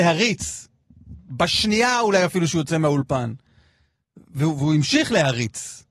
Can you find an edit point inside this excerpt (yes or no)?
no